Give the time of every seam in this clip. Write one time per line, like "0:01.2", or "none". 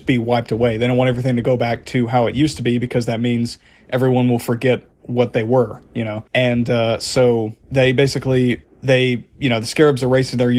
0:04.9
0:06.3
0:07.6
0:08.6